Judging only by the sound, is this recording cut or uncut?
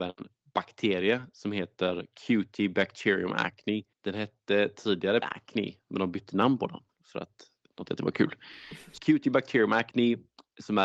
cut